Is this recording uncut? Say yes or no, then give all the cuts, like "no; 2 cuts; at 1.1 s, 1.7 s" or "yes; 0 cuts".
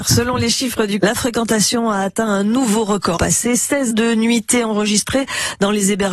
no; 3 cuts; at 1.0 s, 3.2 s, 3.9 s